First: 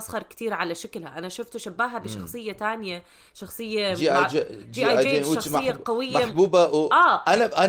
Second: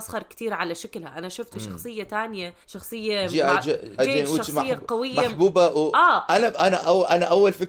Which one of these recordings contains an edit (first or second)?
second